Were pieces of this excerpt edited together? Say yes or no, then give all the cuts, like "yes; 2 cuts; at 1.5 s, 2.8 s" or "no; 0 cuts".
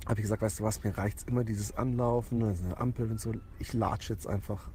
no; 0 cuts